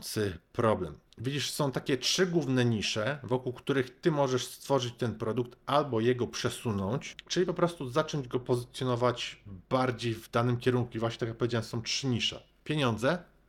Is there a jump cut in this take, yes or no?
no